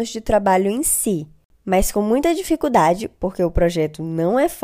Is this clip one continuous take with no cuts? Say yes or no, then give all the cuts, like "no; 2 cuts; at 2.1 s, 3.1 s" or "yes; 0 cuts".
yes; 0 cuts